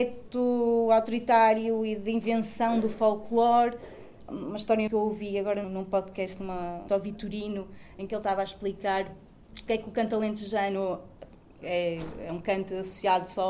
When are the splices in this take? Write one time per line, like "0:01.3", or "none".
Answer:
0:04.3
0:04.9
0:05.6
0:06.9
0:09.7
0:11.6